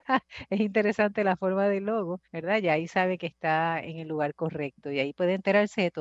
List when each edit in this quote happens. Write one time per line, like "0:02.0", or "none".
0:02.2